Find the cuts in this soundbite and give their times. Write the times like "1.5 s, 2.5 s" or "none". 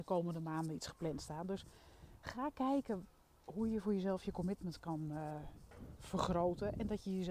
none